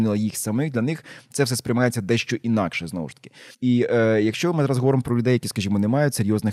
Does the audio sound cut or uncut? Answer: cut